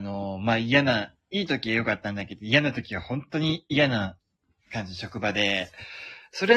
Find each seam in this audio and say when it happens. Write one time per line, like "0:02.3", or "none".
none